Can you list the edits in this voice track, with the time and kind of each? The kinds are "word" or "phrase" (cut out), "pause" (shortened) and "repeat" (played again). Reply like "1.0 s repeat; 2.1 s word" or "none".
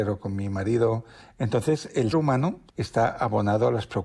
2.1 s word; 2.7 s pause